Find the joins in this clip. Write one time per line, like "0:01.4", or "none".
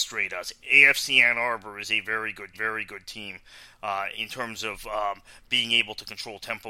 0:02.5
0:04.1